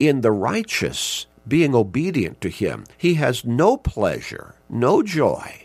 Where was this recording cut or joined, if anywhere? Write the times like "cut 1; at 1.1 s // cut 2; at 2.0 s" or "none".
cut 1; at 1.3 s // cut 2; at 2.9 s // cut 3; at 4.6 s

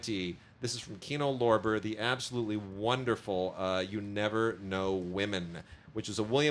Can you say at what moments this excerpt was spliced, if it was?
none

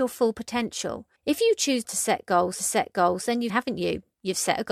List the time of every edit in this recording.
cut 1; at 1.2 s // cut 2; at 1.8 s // cut 3; at 2.6 s // cut 4; at 3.5 s

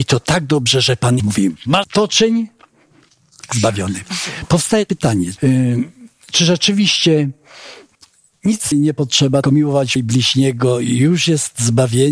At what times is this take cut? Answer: cut 1; at 1.2 s // cut 2; at 1.8 s // cut 3; at 3.5 s // cut 4; at 4.9 s // cut 5; at 5.4 s // cut 6; at 8.7 s // cut 7; at 9.4 s // cut 8; at 10.0 s

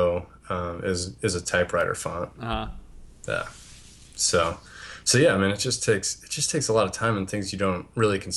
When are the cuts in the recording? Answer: none

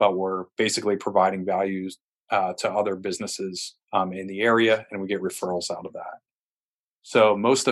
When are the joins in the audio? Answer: cut 1; at 3.8 s

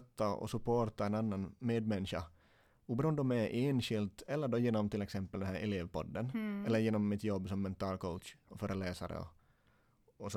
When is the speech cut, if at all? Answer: none

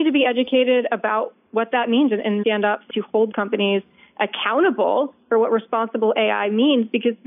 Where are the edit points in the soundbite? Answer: cut 1; at 2.4 s // cut 2; at 2.9 s // cut 3; at 3.3 s

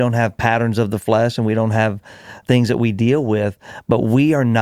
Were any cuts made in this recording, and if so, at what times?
cut 1; at 2.4 s

